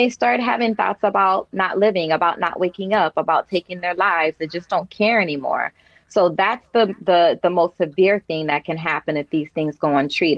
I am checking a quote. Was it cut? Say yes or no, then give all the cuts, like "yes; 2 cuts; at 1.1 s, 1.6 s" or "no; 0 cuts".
no; 0 cuts